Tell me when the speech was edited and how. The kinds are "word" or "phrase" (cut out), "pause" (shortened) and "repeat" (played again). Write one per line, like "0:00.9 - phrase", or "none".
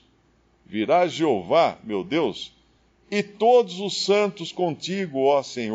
none